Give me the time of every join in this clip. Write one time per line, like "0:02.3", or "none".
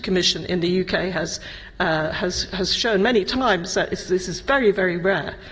none